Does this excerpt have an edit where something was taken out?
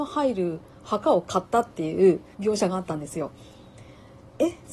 yes; 1 cut; at 2.3 s

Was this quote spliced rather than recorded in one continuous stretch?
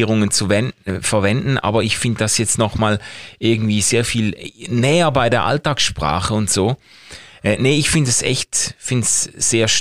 no; 0 cuts

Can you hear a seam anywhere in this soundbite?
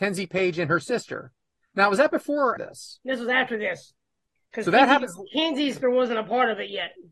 yes; 2 cuts; at 2.6 s, 5.8 s

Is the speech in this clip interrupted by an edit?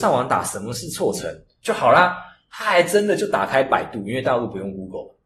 no; 0 cuts

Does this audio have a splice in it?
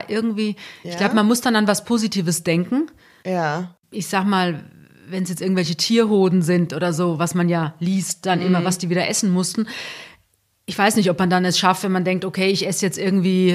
no; 0 cuts

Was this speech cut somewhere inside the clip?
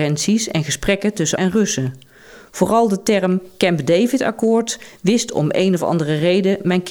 yes; 1 cut; at 1.4 s

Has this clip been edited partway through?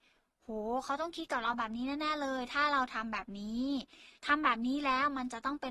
yes; 1 cut; at 4.2 s

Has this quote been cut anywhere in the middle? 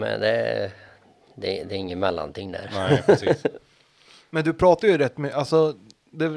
no; 0 cuts

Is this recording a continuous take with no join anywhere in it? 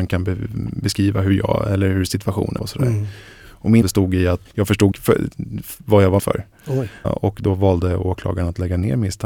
no; 6 cuts; at 2.6 s, 3.8 s, 4.5 s, 4.9 s, 6.2 s, 7.0 s

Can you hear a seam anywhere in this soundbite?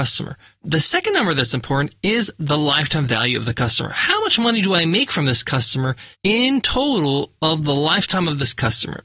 yes; 1 cut; at 6.1 s

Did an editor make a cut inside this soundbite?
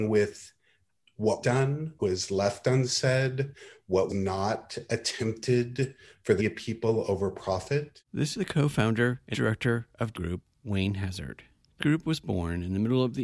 yes; 8 cuts; at 1.4 s, 2.0 s, 4.1 s, 6.4 s, 8.3 s, 9.3 s, 10.1 s, 11.8 s

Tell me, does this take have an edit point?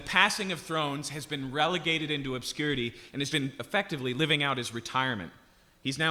yes; 1 cut; at 3.3 s

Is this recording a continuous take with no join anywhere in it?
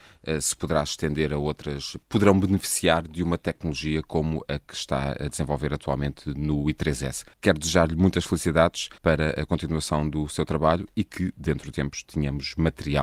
no; 4 cuts; at 2.0 s, 7.3 s, 9.0 s, 11.7 s

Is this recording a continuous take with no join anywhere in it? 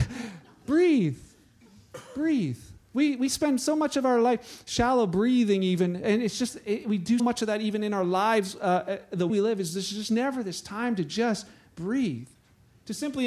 no; 3 cuts; at 2.8 s, 7.2 s, 9.3 s

